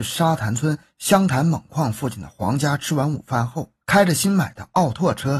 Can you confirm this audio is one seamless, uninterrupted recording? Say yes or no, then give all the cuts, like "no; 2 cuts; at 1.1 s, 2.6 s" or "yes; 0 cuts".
no; 1 cut; at 3.8 s